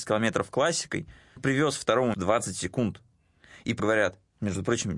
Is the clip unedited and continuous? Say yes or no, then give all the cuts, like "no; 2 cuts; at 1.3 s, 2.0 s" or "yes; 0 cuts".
no; 3 cuts; at 1.4 s, 2.1 s, 3.8 s